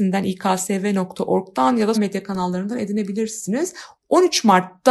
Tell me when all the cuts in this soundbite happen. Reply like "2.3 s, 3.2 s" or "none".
1.9 s